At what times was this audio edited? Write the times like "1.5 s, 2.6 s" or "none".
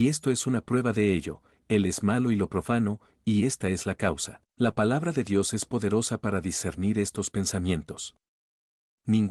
4.5 s